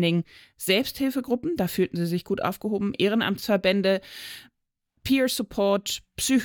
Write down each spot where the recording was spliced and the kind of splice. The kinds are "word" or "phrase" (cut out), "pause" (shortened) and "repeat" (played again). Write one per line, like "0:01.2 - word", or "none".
none